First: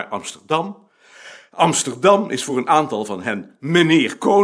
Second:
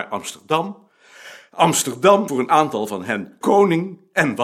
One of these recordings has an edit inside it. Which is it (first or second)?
second